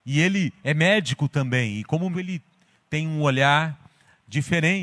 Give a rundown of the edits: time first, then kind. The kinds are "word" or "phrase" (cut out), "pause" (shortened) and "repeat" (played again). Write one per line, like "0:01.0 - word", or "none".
0:02.1 - word

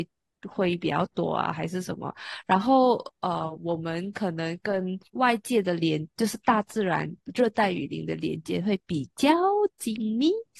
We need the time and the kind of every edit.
0:05.1 - pause

